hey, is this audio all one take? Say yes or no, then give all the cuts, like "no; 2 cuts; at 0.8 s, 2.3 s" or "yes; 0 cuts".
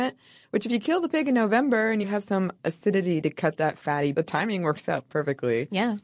no; 3 cuts; at 2.0 s, 4.1 s, 5.1 s